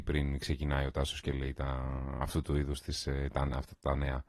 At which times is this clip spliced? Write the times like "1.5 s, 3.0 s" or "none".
none